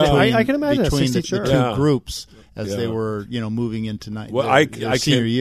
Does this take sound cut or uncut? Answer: cut